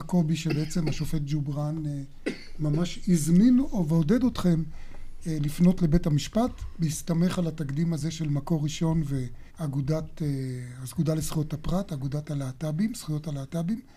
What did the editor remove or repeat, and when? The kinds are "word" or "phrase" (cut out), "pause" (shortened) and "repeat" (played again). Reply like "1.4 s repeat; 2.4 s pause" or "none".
9.5 s pause